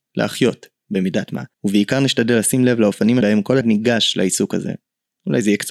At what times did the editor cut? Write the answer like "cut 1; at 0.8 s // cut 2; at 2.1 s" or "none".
cut 1; at 1.5 s // cut 2; at 3.2 s // cut 3; at 3.6 s